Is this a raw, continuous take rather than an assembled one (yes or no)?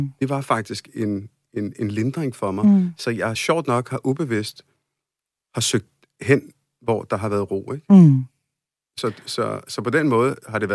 yes